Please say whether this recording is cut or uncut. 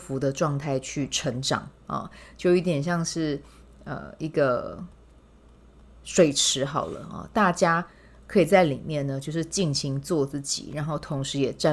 uncut